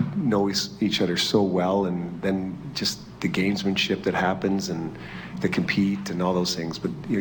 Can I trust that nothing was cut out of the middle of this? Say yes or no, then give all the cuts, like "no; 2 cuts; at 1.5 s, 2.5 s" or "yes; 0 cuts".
yes; 0 cuts